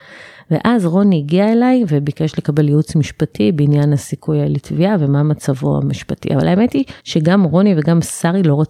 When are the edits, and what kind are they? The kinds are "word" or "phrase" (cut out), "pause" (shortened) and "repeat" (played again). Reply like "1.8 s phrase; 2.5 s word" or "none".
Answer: 7.0 s pause